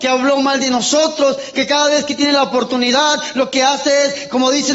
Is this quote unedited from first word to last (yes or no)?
yes